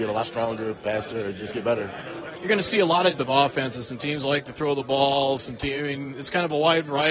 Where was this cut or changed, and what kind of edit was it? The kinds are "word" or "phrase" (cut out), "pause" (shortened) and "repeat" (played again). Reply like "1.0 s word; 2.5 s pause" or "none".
3.2 s phrase